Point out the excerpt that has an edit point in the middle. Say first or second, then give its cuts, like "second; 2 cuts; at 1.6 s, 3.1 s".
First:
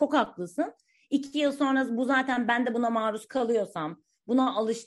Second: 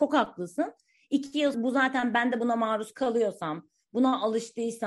second; 1 cut; at 1.5 s